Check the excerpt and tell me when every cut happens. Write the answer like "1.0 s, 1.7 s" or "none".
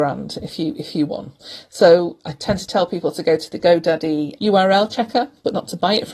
1.1 s, 4.4 s